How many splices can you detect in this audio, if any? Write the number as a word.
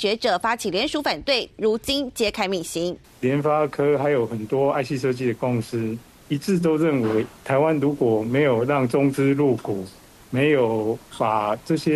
zero